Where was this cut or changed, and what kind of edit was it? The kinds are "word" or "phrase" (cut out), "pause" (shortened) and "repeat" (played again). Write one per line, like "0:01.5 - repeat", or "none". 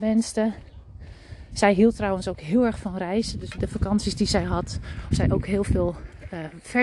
0:03.6 - word
0:05.1 - word